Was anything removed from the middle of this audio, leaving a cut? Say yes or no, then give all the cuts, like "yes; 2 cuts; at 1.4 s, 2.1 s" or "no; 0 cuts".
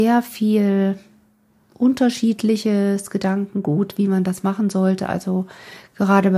no; 0 cuts